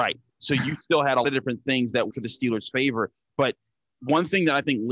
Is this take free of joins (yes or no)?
no